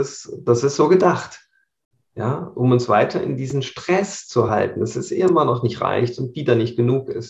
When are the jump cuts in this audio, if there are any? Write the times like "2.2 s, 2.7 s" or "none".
none